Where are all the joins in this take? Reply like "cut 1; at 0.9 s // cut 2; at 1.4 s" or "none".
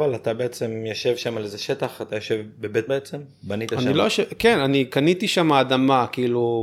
cut 1; at 2.9 s